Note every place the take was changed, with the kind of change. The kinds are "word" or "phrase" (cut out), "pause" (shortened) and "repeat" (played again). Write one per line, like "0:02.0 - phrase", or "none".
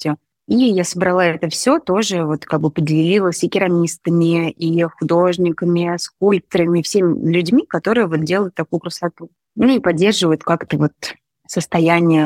none